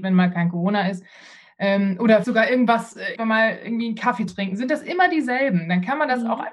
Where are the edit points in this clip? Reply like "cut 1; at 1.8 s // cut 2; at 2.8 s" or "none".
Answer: cut 1; at 2.2 s // cut 2; at 3.2 s // cut 3; at 4.3 s